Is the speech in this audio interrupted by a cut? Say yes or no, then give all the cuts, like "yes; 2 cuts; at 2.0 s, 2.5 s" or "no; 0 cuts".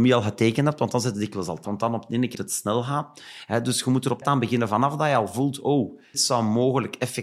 yes; 4 cuts; at 1.6 s, 2.3 s, 4.2 s, 6.1 s